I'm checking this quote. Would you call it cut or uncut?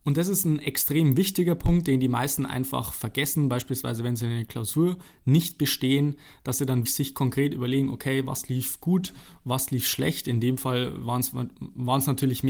cut